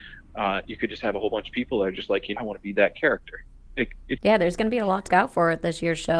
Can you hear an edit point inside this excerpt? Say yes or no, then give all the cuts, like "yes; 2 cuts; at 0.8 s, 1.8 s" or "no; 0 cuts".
yes; 4 cuts; at 2.4 s, 3.7 s, 4.2 s, 5.1 s